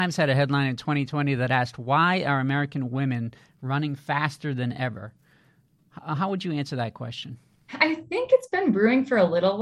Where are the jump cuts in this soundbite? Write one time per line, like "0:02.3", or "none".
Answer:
none